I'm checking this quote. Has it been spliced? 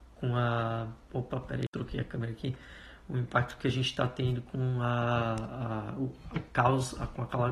no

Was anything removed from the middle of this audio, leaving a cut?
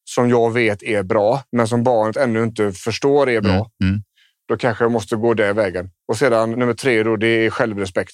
yes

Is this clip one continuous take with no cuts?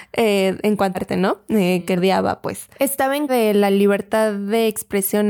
no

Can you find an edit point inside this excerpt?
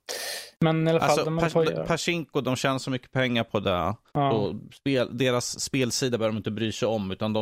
yes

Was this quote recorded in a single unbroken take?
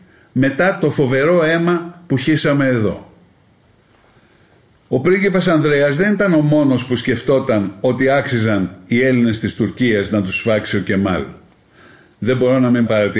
yes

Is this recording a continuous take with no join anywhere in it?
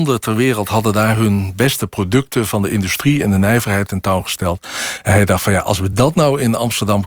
yes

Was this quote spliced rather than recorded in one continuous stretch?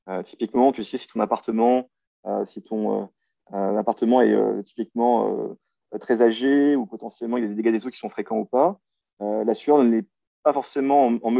no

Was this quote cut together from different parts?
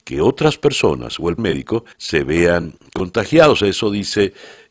yes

